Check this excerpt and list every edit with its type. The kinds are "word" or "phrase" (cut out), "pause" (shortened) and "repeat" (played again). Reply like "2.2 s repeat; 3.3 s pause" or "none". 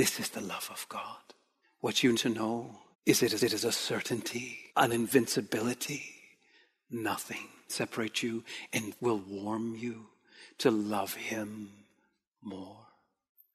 1.6 s pause; 2.1 s word; 2.9 s pause; 3.4 s repeat; 4.7 s pause; 7.7 s word; 9.0 s word